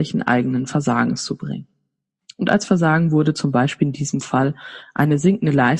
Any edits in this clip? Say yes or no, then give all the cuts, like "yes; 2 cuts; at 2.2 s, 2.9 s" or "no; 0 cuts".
no; 0 cuts